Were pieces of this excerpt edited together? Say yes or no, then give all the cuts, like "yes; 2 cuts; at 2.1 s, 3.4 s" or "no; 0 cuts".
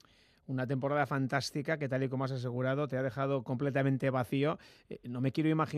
no; 0 cuts